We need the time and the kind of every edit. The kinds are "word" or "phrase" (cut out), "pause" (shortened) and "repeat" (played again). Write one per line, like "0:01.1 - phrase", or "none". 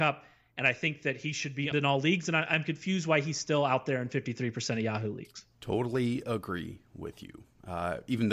0:01.7 - word

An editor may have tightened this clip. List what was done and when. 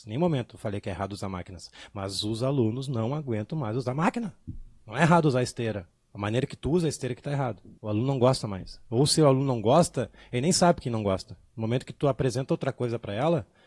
0:04.8 - pause
0:07.8 - pause

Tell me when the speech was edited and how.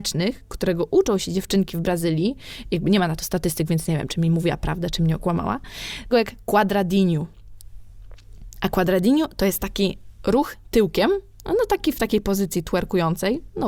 0:06.1 - phrase

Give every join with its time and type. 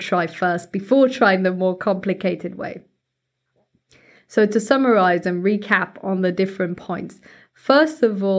none

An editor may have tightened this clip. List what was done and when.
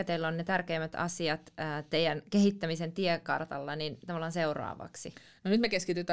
none

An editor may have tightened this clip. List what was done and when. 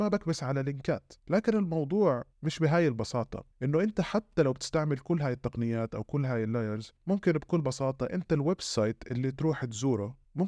0:01.2 - pause
0:03.5 - pause
0:07.0 - pause

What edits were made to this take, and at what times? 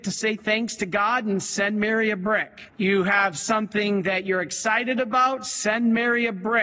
0:02.7 - pause

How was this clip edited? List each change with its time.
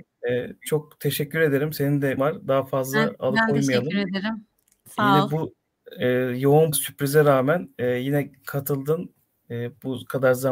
0:02.2 - word
0:06.7 - word

